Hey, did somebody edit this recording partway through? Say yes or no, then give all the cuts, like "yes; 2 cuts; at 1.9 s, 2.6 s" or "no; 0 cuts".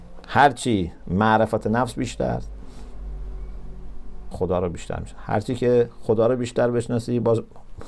yes; 1 cut; at 4.3 s